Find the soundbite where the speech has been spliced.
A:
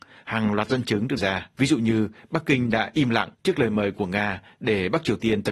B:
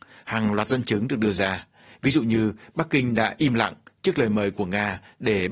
A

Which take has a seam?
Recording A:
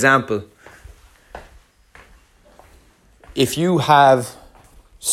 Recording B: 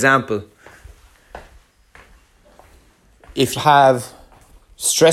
B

